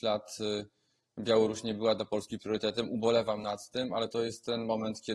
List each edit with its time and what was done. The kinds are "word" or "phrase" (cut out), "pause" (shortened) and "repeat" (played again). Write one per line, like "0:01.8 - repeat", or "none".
none